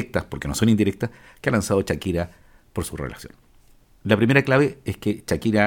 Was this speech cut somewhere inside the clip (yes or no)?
no